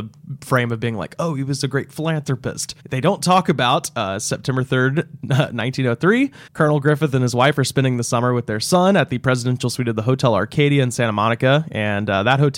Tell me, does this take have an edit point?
yes; 2 cuts; at 2.8 s, 6.5 s

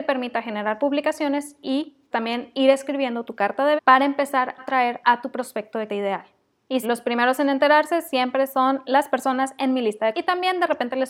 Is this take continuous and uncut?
no; 6 cuts; at 2.1 s, 3.8 s, 4.6 s, 5.9 s, 6.8 s, 10.1 s

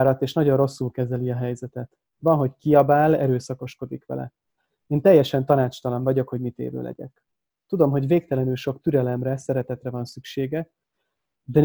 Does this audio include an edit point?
no; 0 cuts

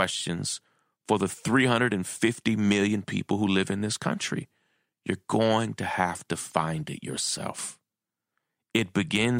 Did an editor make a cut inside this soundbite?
no; 0 cuts

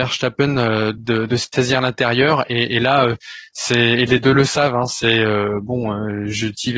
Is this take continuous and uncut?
yes; 0 cuts

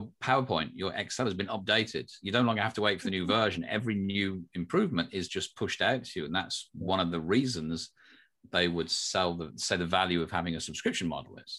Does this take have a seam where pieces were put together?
no; 0 cuts

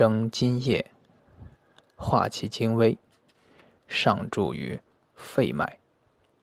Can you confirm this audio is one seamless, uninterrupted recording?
yes; 0 cuts

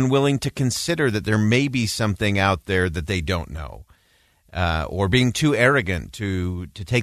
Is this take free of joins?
yes; 0 cuts

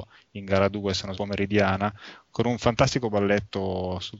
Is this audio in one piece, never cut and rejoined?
no; 1 cut; at 1.1 s

